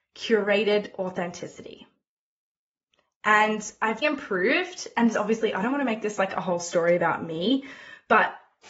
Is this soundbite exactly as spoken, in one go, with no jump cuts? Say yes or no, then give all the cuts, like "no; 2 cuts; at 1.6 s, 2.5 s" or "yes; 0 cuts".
no; 2 cuts; at 4.0 s, 5.1 s